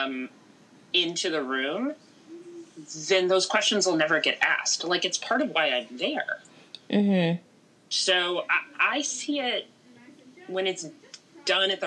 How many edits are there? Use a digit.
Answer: 0